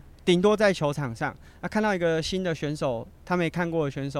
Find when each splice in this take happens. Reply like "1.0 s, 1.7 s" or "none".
none